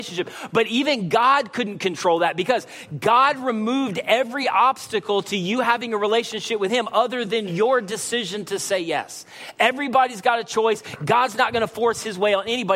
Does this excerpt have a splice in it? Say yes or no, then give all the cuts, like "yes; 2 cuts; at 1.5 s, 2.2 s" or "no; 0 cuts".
no; 0 cuts